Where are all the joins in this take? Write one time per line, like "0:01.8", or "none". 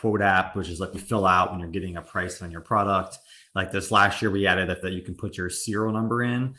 0:00.9
0:04.8